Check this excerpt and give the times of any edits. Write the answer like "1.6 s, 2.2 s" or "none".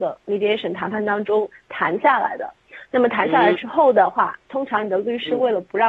none